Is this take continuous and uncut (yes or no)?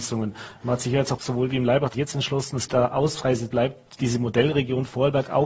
no